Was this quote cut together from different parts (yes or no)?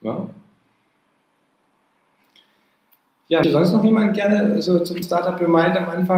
yes